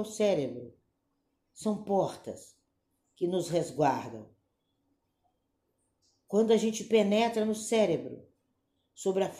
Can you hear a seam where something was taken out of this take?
no; 0 cuts

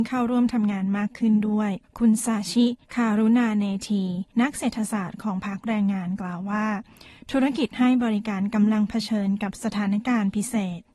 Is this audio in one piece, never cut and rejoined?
no; 3 cuts; at 1.8 s, 2.8 s, 4.3 s

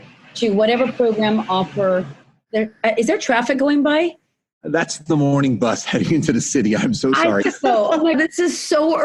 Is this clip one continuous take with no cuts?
no; 3 cuts; at 5.1 s, 7.4 s, 8.1 s

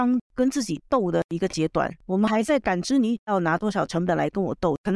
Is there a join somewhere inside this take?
yes; 1 cut; at 2.0 s

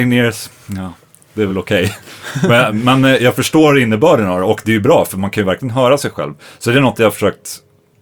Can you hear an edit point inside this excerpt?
no; 0 cuts

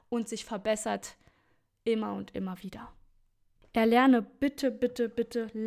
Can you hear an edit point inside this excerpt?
no; 0 cuts

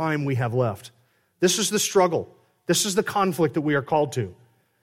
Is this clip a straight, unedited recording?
yes; 0 cuts

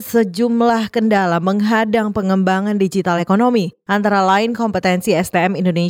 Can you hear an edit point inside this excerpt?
no; 0 cuts

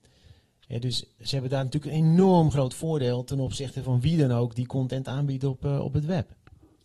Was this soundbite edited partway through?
no; 0 cuts

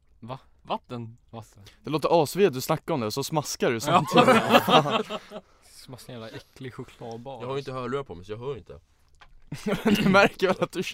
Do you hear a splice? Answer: no; 0 cuts

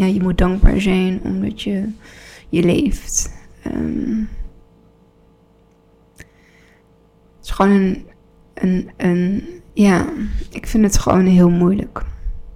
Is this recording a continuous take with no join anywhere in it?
yes; 0 cuts

